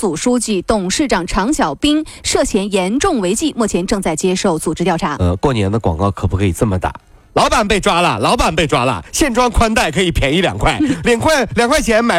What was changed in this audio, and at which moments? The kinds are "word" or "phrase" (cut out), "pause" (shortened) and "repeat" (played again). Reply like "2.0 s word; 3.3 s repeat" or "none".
none